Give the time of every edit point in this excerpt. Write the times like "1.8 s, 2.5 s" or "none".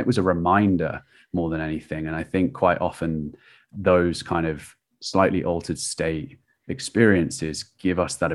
none